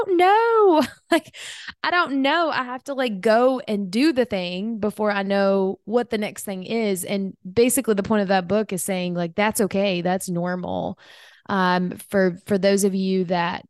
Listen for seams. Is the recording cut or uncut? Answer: uncut